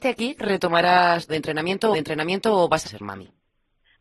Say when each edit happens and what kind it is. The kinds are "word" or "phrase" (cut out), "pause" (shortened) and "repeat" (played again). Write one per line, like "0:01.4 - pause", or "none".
0:01.3 - phrase
0:01.9 - repeat
0:02.8 - phrase